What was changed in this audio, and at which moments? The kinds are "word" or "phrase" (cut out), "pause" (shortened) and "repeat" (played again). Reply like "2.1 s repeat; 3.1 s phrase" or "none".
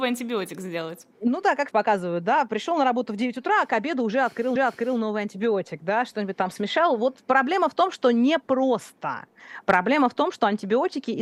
1.1 s pause; 1.7 s word; 4.6 s repeat